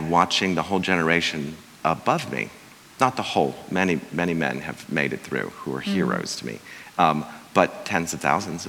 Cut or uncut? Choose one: uncut